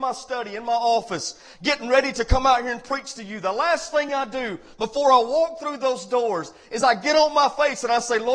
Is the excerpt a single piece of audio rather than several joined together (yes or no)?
yes